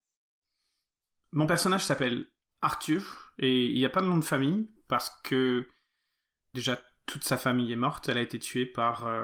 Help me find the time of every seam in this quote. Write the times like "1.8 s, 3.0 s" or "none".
2.5 s